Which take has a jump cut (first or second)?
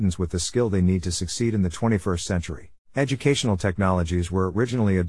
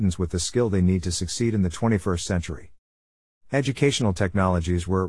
first